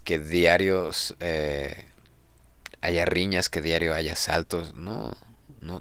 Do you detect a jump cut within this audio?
no; 0 cuts

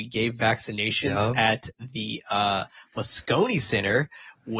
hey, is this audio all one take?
yes; 0 cuts

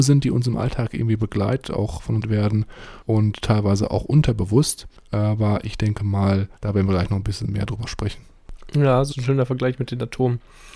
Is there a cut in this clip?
yes; 5 cuts; at 1.6 s, 2.2 s, 3.0 s, 6.6 s, 9.1 s

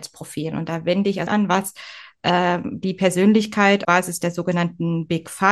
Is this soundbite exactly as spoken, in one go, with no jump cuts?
no; 2 cuts; at 1.3 s, 3.8 s

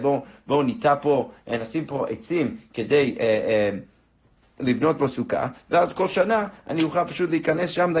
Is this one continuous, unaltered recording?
yes; 0 cuts

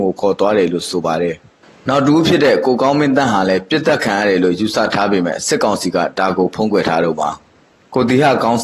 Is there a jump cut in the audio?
no; 0 cuts

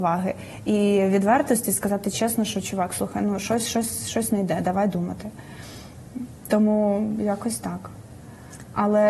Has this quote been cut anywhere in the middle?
no; 0 cuts

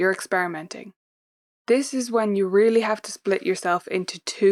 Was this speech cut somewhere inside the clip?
no; 0 cuts

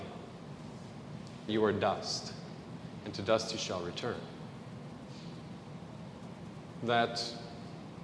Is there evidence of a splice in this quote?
yes; 1 cut; at 1.5 s

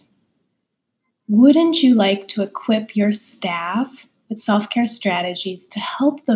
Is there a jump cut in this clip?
no; 0 cuts

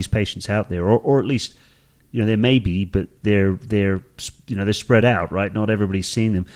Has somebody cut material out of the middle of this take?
no; 0 cuts

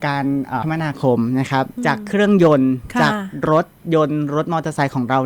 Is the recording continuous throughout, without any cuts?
yes; 0 cuts

